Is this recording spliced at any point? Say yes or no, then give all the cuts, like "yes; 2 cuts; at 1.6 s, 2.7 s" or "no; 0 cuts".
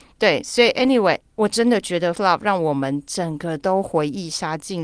yes; 1 cut; at 2.2 s